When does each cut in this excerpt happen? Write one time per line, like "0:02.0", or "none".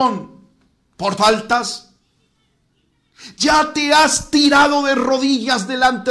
0:01.2